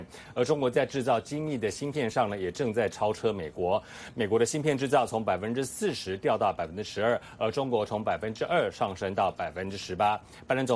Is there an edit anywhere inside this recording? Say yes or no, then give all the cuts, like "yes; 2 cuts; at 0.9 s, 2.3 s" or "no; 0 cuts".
no; 0 cuts